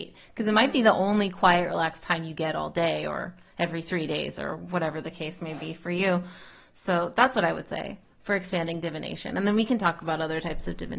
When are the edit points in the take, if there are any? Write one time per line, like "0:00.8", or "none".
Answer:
none